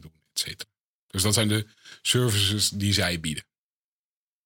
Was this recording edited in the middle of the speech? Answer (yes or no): no